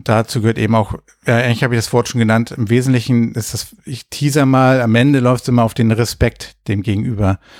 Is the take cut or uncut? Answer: uncut